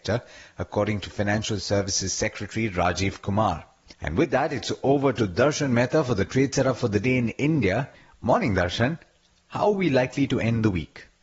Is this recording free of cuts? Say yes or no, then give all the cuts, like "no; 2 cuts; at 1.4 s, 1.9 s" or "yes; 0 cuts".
yes; 0 cuts